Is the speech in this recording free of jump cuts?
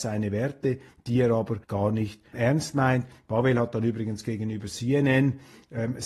no; 2 cuts; at 1.6 s, 2.3 s

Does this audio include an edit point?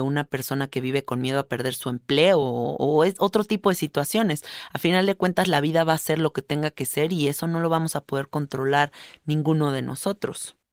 no; 0 cuts

